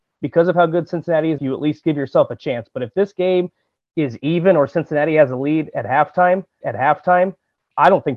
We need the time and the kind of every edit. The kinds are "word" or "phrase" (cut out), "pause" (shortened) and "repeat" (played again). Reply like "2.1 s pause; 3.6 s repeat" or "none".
1.4 s phrase; 6.6 s repeat